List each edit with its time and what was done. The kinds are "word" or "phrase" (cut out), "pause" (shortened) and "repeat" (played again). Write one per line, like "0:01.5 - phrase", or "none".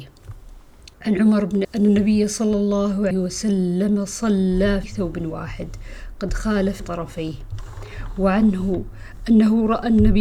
0:00.9 - pause
0:01.6 - phrase
0:03.1 - word
0:04.8 - word
0:06.8 - word